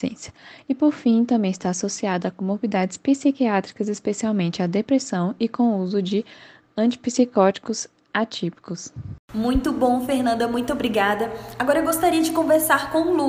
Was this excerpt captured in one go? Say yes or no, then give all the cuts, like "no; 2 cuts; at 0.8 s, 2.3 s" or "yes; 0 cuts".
yes; 0 cuts